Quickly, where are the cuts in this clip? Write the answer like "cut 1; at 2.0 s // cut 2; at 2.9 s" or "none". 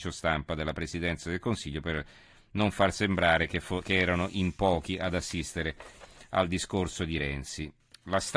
none